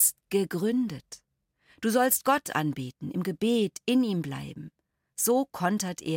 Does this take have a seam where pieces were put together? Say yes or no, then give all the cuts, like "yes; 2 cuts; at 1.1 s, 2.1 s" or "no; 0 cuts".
no; 0 cuts